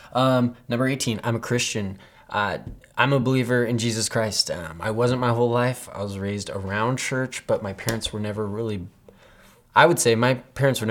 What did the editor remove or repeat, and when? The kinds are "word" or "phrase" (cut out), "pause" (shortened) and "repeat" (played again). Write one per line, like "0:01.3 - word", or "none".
none